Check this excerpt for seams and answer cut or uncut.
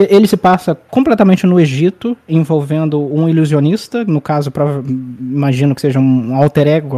uncut